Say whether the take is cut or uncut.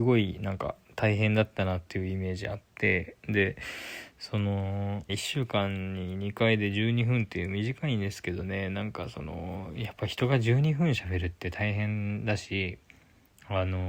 cut